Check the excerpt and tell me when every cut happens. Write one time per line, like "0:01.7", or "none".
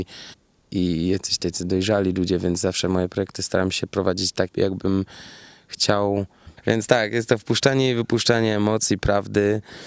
0:04.5